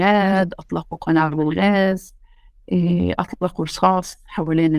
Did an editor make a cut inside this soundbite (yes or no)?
no